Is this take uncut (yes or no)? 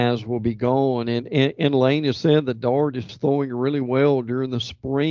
yes